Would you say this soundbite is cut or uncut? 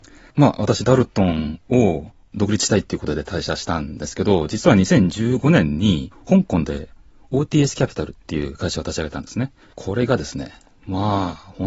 uncut